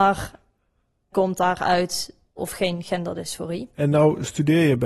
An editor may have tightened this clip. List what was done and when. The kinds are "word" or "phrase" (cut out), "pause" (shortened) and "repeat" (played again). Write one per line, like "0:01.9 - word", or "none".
0:01.1 - word
0:02.4 - word
0:03.7 - pause